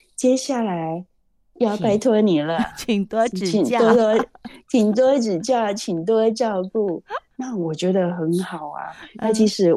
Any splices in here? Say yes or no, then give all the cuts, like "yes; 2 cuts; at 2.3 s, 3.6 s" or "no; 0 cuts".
no; 0 cuts